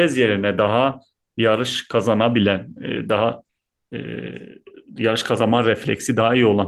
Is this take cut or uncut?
uncut